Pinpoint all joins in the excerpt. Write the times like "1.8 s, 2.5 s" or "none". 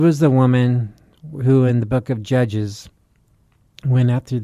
none